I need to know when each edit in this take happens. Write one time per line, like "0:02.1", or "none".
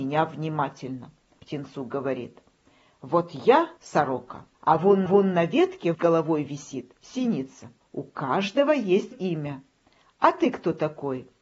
0:01.4
0:03.8
0:04.5
0:05.1
0:05.9
0:07.8
0:09.1

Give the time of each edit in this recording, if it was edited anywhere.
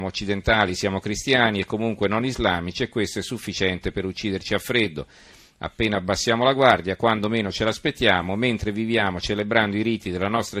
none

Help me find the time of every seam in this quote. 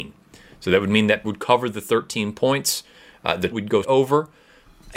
0:01.2
0:03.5
0:03.8

